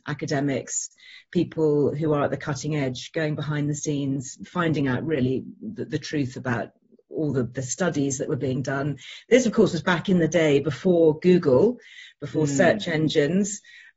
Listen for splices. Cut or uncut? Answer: uncut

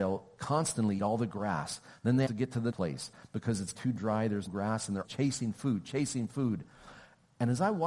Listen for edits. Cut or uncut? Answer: cut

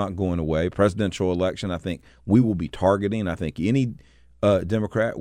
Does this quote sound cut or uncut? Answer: uncut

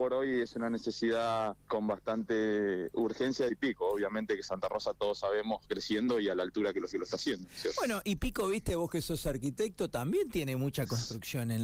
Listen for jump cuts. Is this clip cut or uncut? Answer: cut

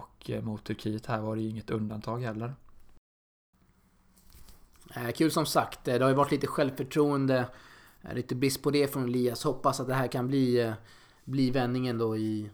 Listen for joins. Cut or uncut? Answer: uncut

